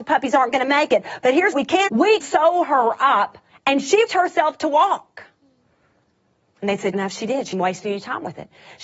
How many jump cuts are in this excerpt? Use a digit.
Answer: 7